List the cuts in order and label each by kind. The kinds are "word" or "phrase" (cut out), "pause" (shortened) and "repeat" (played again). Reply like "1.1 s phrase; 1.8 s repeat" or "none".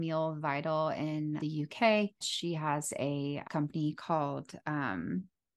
1.4 s word; 2.2 s word; 3.4 s word